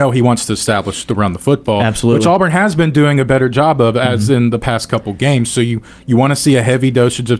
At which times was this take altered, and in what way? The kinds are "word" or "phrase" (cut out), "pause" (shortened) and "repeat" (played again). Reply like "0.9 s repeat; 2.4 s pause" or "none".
none